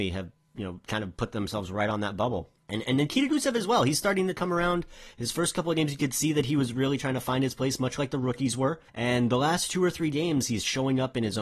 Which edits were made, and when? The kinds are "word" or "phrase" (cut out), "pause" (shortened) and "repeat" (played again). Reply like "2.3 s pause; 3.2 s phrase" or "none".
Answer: 2.6 s pause; 8.9 s pause

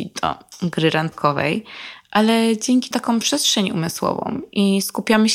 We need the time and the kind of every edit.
2.9 s phrase

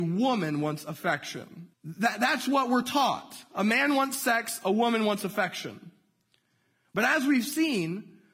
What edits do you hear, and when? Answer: 1.7 s pause

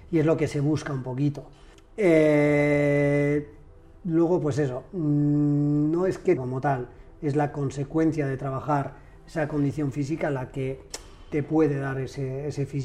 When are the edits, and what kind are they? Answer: 1.7 s pause; 6.4 s phrase

